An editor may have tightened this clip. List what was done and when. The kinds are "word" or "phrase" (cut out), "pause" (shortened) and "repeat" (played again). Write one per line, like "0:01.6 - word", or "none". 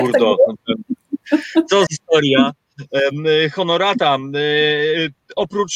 0:01.9 - word